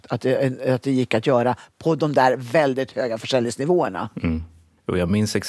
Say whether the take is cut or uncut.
uncut